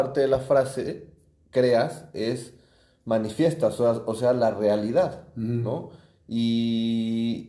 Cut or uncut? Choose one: uncut